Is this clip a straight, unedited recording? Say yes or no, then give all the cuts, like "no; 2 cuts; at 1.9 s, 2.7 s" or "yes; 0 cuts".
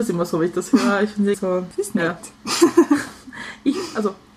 no; 1 cut; at 1.3 s